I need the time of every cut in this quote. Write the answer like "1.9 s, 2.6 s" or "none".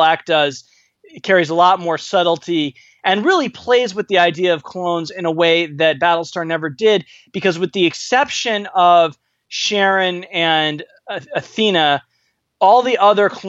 none